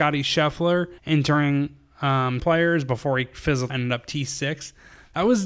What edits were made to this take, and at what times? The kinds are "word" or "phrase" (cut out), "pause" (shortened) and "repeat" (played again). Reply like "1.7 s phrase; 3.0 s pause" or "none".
1.0 s pause; 2.4 s phrase; 3.7 s word